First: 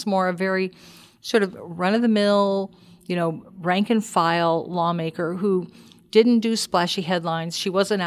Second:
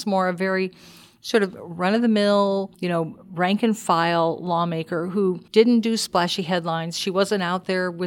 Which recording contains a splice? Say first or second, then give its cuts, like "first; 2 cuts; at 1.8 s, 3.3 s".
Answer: second; 2 cuts; at 2.7 s, 5.5 s